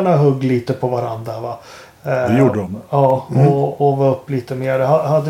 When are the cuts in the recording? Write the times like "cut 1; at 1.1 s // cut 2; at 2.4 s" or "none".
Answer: none